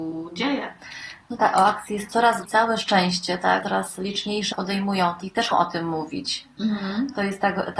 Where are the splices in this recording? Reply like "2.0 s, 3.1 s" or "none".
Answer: 1.4 s, 2.4 s, 3.6 s, 4.5 s, 5.2 s, 5.5 s